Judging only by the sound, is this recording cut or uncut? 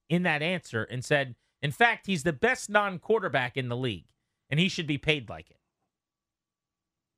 uncut